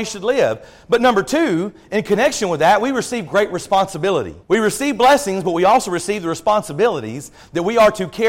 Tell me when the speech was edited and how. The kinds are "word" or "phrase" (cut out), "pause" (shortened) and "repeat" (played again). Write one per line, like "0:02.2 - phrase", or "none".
0:04.4 - pause

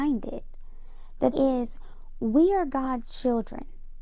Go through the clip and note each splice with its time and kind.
0:01.3 - word

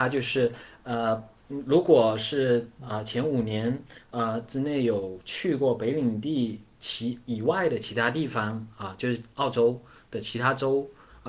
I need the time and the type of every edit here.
0:01.4 - pause

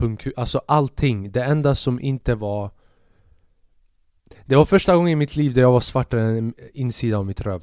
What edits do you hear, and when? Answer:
none

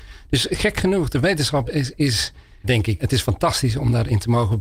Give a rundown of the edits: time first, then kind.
0:01.7 - word
0:02.6 - word
0:03.0 - word

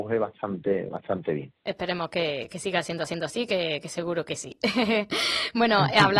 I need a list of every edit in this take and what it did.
0:03.1 - repeat

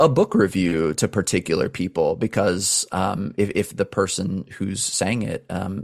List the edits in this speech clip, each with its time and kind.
none

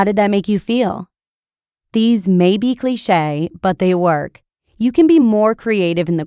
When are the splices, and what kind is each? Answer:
none

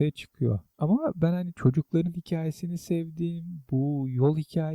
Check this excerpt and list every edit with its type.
none

